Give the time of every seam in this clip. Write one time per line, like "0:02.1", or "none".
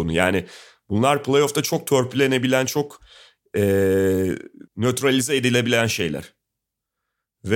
0:04.7